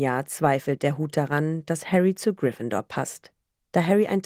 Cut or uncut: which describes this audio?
uncut